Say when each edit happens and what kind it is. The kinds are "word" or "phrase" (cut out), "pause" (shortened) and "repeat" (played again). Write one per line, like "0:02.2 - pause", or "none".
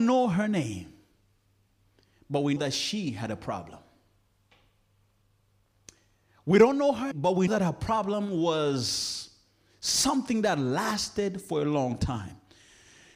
0:02.6 - word
0:07.1 - word
0:07.5 - word